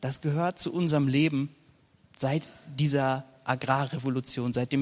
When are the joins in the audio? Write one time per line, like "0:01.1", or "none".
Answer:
none